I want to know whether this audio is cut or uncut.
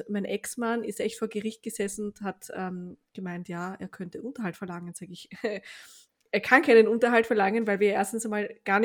uncut